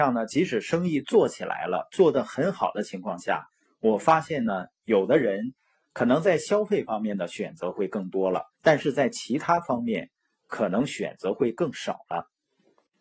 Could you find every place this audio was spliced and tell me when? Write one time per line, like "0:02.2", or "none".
0:08.5